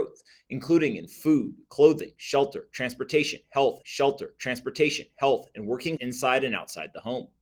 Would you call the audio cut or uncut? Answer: cut